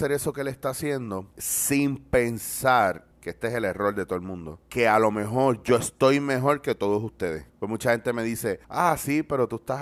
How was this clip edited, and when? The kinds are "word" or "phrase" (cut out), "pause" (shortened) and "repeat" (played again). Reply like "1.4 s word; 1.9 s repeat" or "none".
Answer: 1.3 s pause; 3.1 s pause; 4.6 s pause; 7.5 s pause; 8.6 s pause

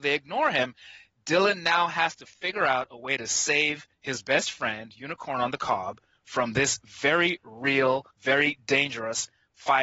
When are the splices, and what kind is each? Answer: 3.9 s pause; 8.1 s pause

